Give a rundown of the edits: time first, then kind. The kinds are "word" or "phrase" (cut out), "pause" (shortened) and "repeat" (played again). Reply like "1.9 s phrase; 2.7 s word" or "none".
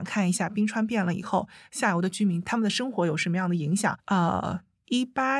4.0 s pause